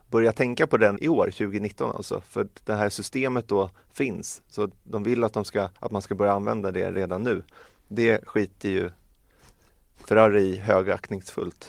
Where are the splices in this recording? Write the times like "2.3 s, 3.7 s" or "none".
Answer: 1.0 s, 5.8 s